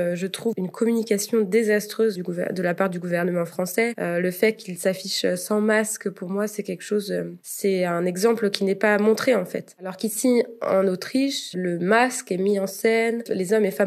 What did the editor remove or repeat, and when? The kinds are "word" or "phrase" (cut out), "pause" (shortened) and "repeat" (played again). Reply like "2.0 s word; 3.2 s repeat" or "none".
2.1 s word; 11.5 s word